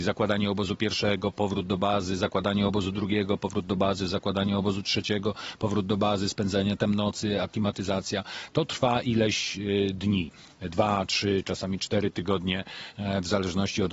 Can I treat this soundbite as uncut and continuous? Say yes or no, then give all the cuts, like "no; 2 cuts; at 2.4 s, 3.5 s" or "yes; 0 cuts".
yes; 0 cuts